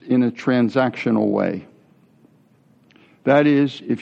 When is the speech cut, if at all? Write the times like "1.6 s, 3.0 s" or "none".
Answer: none